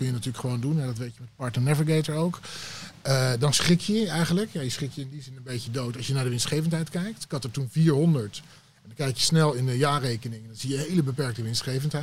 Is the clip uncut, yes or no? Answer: yes